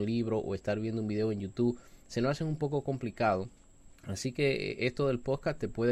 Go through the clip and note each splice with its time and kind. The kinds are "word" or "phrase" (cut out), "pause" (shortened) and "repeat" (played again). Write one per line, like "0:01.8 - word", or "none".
0:04.0 - pause